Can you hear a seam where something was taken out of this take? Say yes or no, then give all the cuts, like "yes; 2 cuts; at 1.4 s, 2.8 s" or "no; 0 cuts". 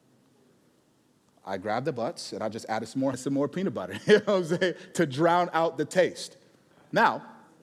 yes; 1 cut; at 3.1 s